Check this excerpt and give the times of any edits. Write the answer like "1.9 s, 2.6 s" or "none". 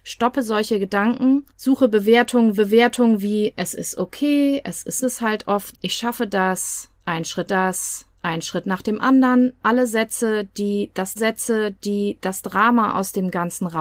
1.5 s, 2.6 s, 5.0 s, 5.7 s, 7.5 s, 11.2 s